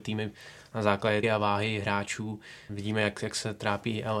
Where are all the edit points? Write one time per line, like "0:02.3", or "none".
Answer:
0:01.2